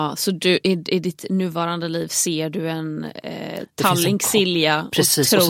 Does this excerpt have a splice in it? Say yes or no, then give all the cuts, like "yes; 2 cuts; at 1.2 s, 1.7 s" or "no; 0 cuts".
no; 0 cuts